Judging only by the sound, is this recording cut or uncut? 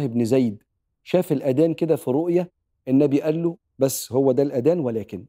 uncut